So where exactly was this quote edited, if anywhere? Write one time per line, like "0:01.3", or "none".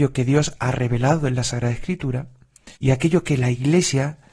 0:02.7

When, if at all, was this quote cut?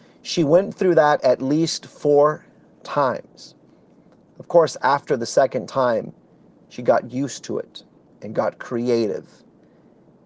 none

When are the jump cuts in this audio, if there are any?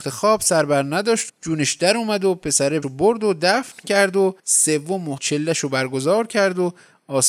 0:01.3
0:02.8
0:04.4
0:05.2

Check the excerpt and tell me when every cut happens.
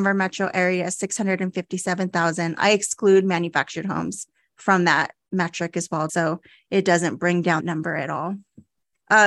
0:06.1
0:07.6

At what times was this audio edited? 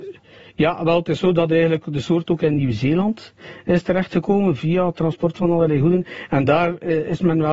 none

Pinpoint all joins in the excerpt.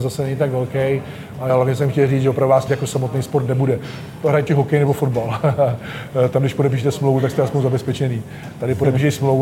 0:01.5
0:02.7
0:04.5

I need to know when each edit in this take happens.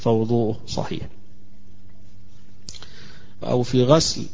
0:03.4

